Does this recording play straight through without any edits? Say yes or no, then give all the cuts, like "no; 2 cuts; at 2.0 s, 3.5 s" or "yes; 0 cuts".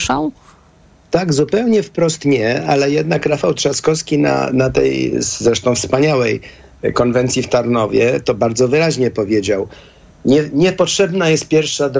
yes; 0 cuts